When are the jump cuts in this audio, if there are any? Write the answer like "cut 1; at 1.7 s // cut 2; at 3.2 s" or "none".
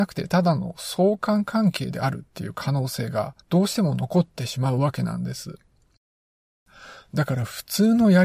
cut 1; at 3.4 s